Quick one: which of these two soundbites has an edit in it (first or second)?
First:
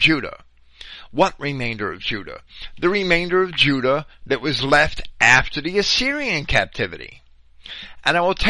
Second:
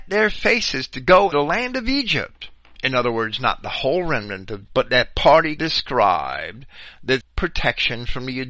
second